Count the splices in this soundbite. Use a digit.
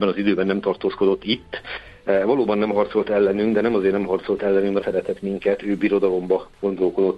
1